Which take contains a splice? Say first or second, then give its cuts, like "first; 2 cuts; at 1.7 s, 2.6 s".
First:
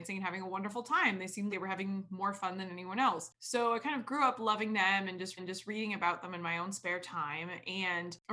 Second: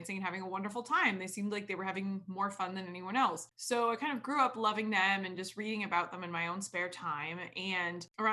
first; 2 cuts; at 1.5 s, 5.4 s